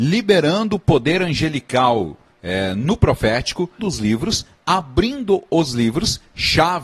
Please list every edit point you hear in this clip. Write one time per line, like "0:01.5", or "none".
0:03.8